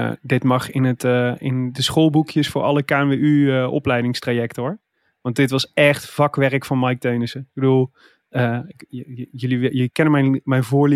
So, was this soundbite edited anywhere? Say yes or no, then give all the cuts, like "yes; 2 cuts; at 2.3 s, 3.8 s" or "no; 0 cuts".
no; 0 cuts